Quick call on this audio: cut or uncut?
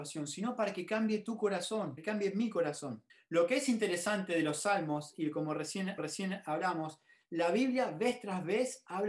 cut